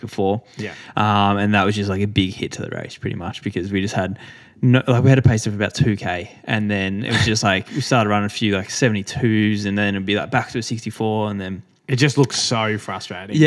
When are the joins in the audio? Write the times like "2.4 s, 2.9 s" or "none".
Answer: none